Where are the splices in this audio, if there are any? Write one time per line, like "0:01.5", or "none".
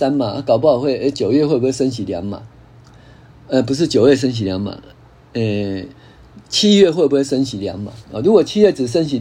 0:08.0